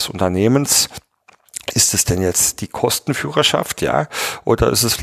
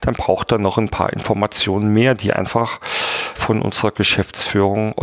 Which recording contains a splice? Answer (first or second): second